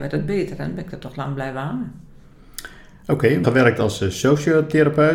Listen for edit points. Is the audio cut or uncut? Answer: cut